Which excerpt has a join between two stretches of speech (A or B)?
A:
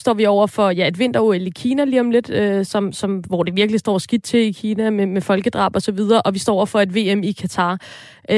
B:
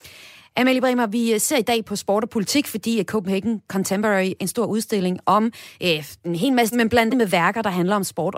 B